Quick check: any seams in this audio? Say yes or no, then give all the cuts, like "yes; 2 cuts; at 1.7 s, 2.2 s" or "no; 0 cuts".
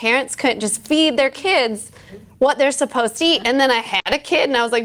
no; 0 cuts